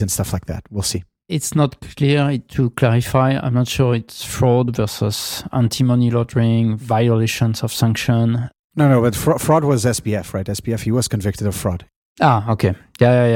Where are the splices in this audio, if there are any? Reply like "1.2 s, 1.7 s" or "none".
2.5 s